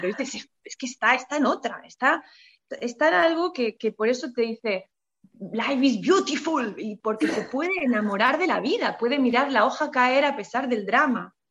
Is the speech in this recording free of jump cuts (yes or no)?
yes